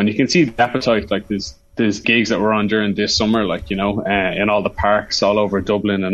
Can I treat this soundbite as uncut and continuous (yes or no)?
no